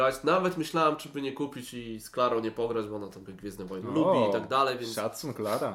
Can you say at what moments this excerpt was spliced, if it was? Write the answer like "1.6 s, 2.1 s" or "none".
3.3 s

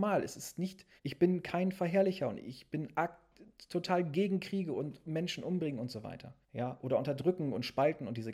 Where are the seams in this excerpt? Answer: 1.0 s, 6.4 s

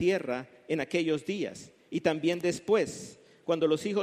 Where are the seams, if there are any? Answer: none

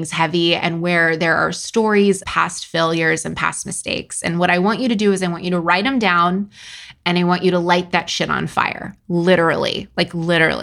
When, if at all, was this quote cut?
2.2 s

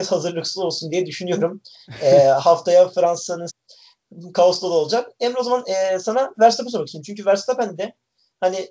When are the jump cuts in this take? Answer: 3.5 s

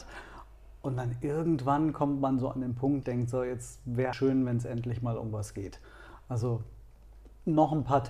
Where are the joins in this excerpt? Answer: 3.0 s, 4.1 s

